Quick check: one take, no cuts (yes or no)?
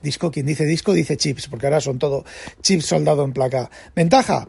yes